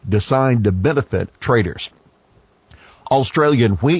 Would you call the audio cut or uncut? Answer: cut